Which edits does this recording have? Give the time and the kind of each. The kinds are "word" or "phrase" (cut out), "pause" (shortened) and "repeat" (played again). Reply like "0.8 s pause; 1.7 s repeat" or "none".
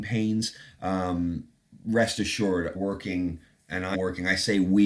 1.7 s word; 2.7 s word; 3.9 s word